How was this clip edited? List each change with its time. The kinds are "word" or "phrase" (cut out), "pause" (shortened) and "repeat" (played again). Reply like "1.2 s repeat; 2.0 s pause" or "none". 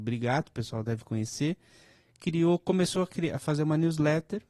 none